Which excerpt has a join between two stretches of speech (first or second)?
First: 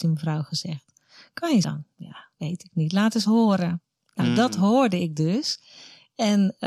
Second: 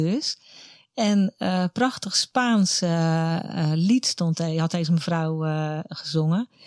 first